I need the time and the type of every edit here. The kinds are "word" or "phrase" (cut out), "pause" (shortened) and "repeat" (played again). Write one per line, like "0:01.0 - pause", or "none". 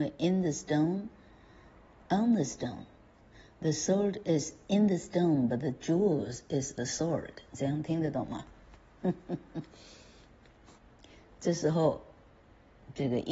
0:06.8 - word
0:09.7 - pause